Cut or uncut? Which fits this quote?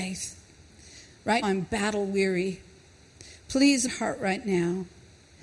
cut